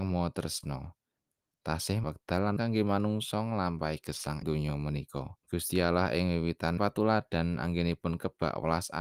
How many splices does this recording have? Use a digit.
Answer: 5